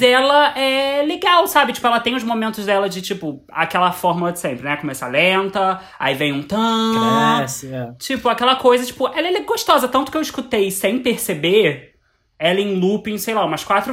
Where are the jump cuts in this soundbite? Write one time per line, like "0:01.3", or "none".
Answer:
none